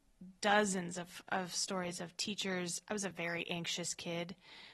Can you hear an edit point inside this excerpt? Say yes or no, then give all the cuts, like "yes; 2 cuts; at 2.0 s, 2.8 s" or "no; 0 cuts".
no; 0 cuts